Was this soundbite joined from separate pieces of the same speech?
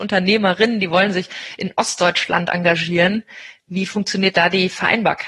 no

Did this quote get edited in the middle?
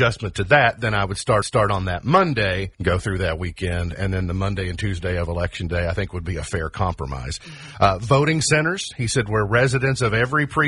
yes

